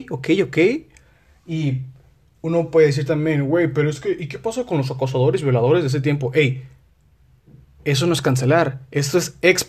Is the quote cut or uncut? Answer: uncut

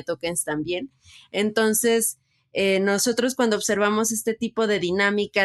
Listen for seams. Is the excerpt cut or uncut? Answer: uncut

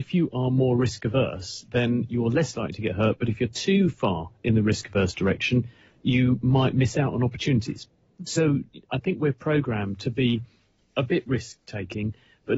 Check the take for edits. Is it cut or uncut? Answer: uncut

